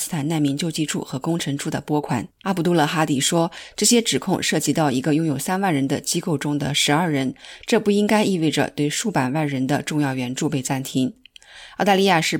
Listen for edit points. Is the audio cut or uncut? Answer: cut